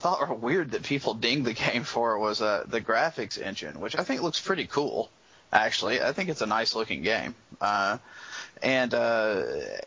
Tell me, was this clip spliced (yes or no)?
no